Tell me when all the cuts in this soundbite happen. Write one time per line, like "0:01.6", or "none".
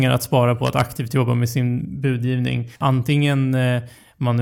0:02.8